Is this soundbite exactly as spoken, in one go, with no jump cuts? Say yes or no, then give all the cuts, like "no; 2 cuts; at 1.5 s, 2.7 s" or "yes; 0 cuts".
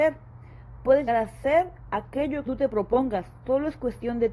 no; 2 cuts; at 1.1 s, 2.5 s